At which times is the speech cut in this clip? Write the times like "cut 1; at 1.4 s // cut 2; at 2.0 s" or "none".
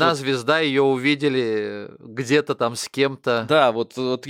none